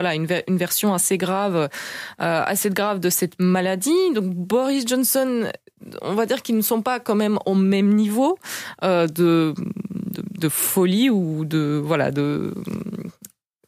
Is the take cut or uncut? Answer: uncut